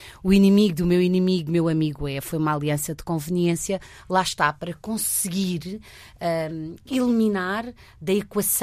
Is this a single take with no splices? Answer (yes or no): yes